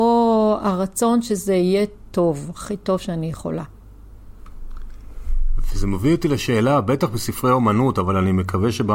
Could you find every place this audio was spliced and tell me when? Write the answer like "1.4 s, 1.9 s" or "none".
none